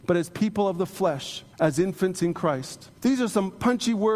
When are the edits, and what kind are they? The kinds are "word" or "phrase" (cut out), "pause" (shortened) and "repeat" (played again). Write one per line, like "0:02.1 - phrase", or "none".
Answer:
0:01.5 - pause
0:03.0 - pause